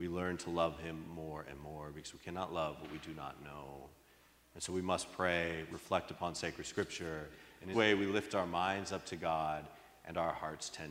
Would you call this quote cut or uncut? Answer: cut